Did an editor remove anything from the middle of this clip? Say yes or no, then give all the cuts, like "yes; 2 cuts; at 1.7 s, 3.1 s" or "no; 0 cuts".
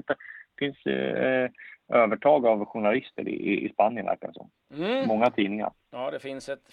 no; 0 cuts